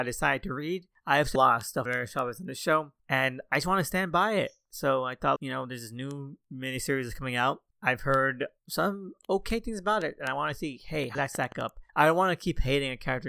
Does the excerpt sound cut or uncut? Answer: cut